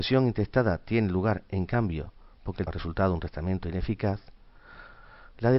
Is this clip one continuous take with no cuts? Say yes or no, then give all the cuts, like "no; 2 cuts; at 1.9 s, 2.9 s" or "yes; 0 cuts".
no; 1 cut; at 2.7 s